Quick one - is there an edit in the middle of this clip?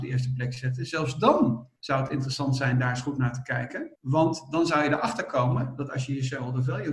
yes; 2 cuts; at 1.8 s, 3.9 s

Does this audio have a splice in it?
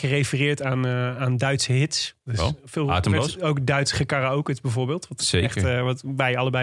yes; 1 cut; at 2.2 s

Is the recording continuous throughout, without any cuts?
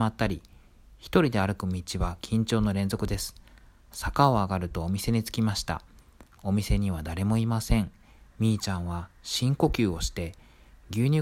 yes; 0 cuts

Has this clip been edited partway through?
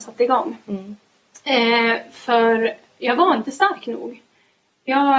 no; 0 cuts

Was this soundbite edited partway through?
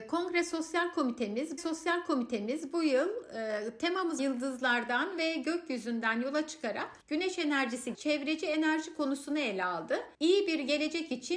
yes; 5 cuts; at 1.6 s, 4.2 s, 7.0 s, 7.9 s, 10.1 s

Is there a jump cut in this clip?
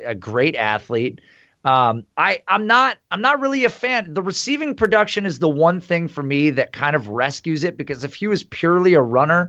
yes; 1 cut; at 2.1 s

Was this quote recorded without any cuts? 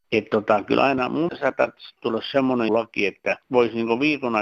no; 3 cuts; at 1.3 s, 2.7 s, 3.4 s

